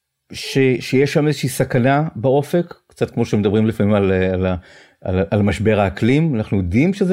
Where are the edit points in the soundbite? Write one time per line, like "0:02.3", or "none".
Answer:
none